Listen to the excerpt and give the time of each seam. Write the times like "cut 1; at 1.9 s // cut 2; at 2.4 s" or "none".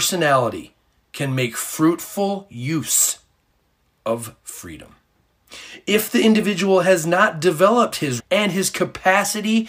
cut 1; at 8.2 s